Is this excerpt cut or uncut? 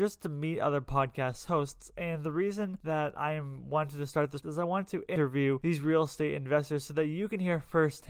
cut